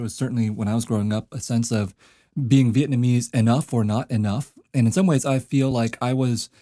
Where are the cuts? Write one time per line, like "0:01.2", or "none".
none